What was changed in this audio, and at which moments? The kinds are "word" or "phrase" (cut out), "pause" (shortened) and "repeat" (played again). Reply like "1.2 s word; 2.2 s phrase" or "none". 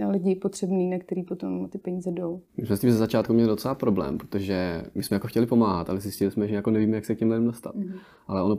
2.5 s pause